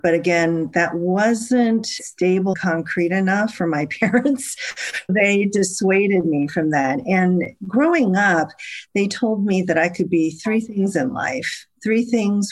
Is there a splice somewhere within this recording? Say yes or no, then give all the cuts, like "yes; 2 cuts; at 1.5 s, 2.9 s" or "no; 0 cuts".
yes; 2 cuts; at 2.5 s, 5.1 s